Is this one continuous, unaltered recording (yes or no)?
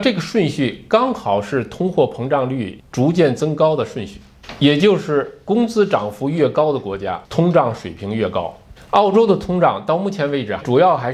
no